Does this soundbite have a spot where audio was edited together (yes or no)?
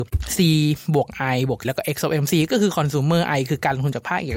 yes